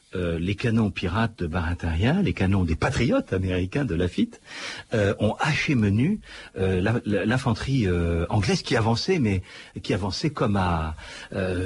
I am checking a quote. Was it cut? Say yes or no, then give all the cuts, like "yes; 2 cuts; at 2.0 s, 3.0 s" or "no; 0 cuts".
no; 0 cuts